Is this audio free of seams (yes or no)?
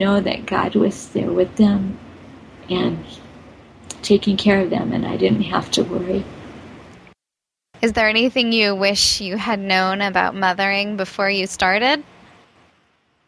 yes